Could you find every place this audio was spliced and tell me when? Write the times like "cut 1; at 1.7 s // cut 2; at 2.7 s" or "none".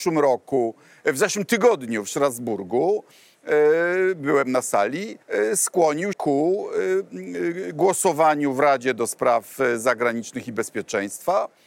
cut 1; at 5.2 s // cut 2; at 6.1 s